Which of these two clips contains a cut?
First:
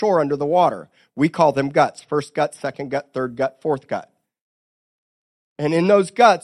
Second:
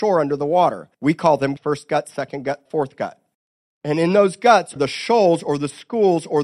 second; 5 cuts; at 0.9 s, 1.6 s, 2.7 s, 3.3 s, 4.8 s

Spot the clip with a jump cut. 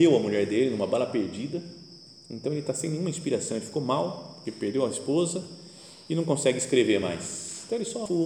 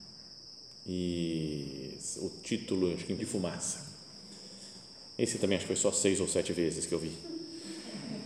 second; 1 cut; at 3.2 s

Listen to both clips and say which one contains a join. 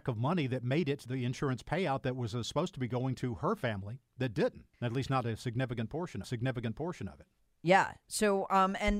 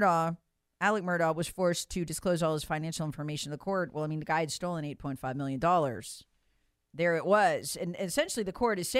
first; 4 cuts; at 1.1 s, 4.7 s, 6.2 s, 7.4 s

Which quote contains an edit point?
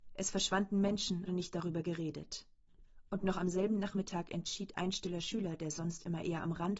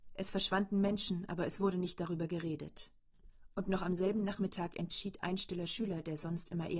first; 1 cut; at 1.3 s

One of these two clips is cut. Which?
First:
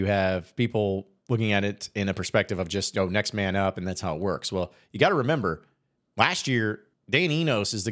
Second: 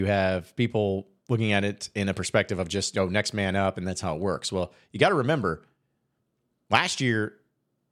first; 2 cuts; at 6.0 s, 6.9 s

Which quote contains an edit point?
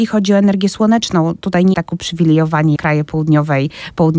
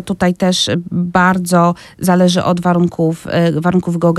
first; 2 cuts; at 1.7 s, 2.8 s

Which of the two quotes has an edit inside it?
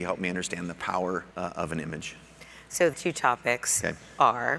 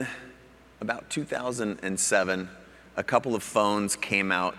first; 2 cuts; at 1.3 s, 2.9 s

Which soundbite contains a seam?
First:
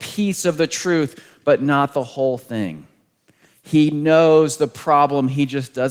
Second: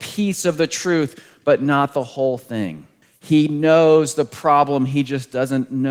second; 1 cut; at 3.0 s

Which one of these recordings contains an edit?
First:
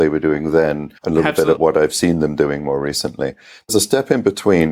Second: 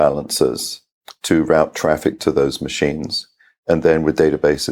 first; 3 cuts; at 1.0 s, 1.6 s, 3.7 s

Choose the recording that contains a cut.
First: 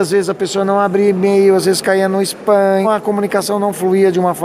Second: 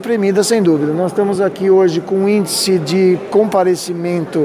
first; 1 cut; at 2.8 s

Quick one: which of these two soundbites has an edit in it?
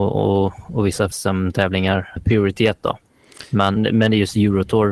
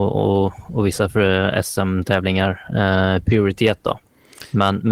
first; 3 cuts; at 1.1 s, 2.2 s, 3.8 s

